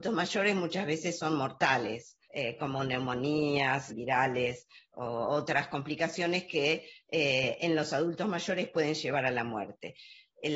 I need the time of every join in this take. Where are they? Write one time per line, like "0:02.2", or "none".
0:02.2
0:03.9